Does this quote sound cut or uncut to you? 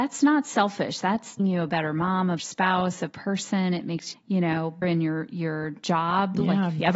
cut